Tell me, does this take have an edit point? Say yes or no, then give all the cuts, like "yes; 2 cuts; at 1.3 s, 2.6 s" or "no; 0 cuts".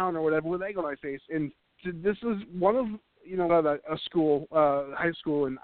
yes; 2 cuts; at 1.6 s, 3.5 s